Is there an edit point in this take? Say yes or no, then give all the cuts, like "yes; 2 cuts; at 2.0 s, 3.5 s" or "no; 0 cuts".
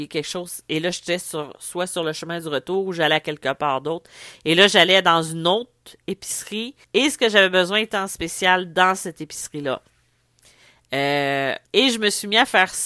yes; 2 cuts; at 6.8 s, 11.6 s